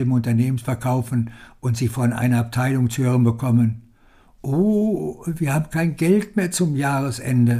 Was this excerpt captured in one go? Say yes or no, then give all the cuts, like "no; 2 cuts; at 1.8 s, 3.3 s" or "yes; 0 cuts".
yes; 0 cuts